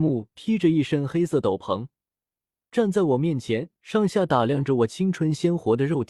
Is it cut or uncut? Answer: uncut